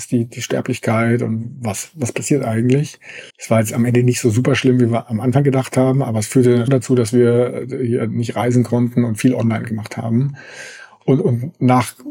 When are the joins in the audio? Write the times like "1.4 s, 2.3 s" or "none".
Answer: 3.3 s, 6.7 s